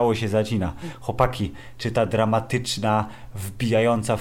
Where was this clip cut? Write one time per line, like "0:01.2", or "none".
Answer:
none